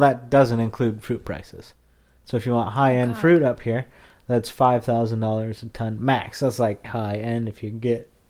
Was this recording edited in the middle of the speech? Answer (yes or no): yes